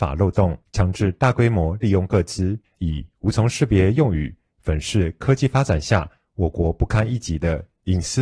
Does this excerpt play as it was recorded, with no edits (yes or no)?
yes